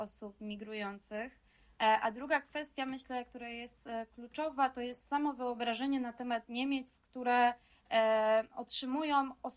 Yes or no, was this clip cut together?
no